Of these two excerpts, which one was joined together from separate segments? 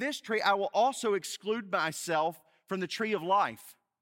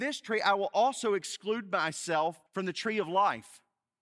second; 1 cut; at 2.5 s

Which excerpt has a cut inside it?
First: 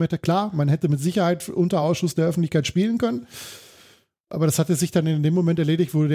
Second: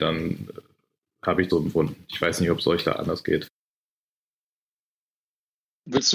second; 1 cut; at 1.5 s

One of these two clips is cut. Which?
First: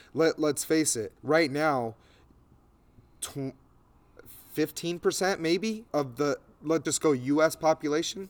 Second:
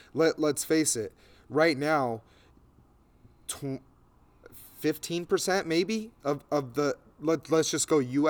first; 3 cuts; at 1.2 s, 5.9 s, 6.8 s

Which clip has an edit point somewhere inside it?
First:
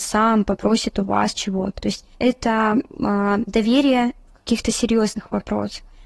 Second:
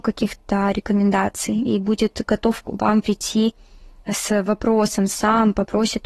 first; 2 cuts; at 1.8 s, 2.1 s

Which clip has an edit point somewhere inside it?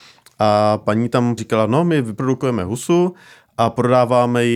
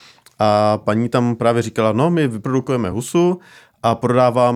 first; 1 cut; at 1.4 s

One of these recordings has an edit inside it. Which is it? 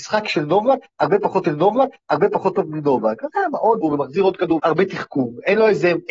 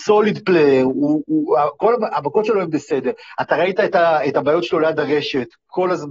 first; 3 cuts; at 1.4 s, 3.8 s, 4.6 s

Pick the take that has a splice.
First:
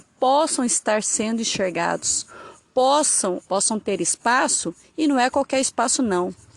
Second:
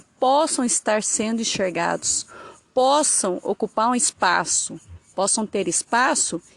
first; 1 cut; at 3.4 s

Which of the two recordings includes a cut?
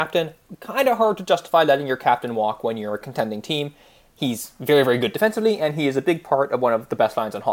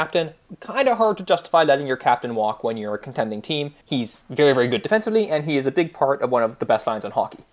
second; 1 cut; at 3.8 s

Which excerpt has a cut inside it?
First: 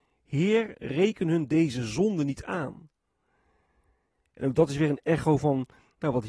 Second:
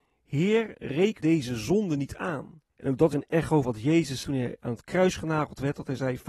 second; 5 cuts; at 1.2 s, 2.7 s, 3.1 s, 3.6 s, 4.2 s

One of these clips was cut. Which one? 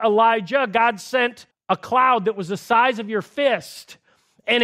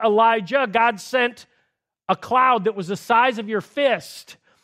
first; 1 cut; at 1.5 s

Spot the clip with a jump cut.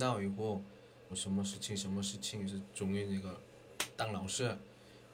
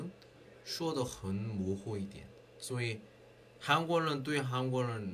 first; 1 cut; at 1.1 s

